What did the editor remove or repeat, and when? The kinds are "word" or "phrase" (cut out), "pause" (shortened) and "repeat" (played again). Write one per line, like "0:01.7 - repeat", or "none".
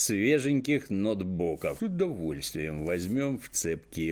0:01.8 - phrase